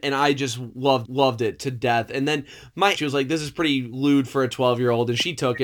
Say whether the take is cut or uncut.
cut